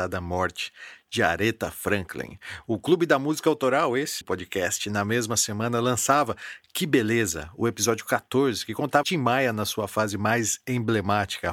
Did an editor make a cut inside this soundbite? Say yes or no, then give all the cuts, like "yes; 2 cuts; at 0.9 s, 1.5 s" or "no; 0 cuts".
yes; 2 cuts; at 4.2 s, 9.0 s